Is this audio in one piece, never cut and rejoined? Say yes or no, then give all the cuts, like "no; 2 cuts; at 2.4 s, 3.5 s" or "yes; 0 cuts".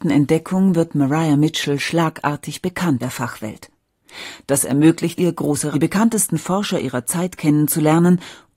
no; 3 cuts; at 3.0 s, 5.2 s, 5.7 s